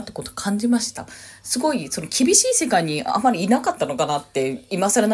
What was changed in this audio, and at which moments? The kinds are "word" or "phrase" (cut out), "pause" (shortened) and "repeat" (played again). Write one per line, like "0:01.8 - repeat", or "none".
none